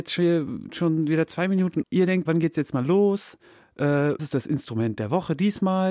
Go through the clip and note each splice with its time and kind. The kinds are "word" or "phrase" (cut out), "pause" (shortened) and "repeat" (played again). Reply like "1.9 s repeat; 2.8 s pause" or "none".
1.8 s word; 2.3 s word; 4.2 s word

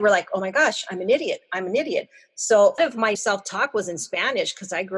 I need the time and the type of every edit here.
2.8 s phrase; 3.1 s word

